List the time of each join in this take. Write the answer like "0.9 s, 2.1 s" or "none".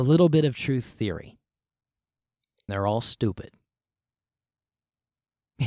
2.7 s